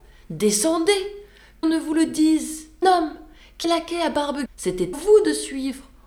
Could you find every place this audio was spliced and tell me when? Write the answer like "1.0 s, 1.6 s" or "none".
1.6 s, 2.8 s, 3.6 s, 4.5 s, 4.9 s